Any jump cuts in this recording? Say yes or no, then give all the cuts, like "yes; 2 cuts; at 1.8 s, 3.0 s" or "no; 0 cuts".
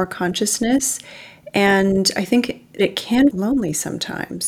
yes; 2 cuts; at 2.8 s, 3.3 s